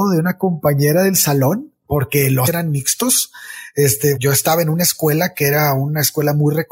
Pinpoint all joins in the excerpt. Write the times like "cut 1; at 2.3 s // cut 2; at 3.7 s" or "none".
cut 1; at 2.5 s // cut 2; at 4.2 s